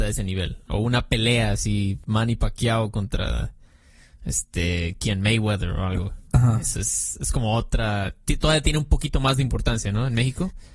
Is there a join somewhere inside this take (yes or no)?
no